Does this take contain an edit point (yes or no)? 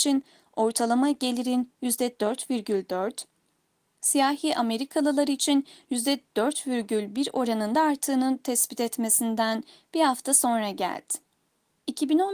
no